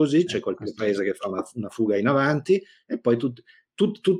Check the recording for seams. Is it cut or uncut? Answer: uncut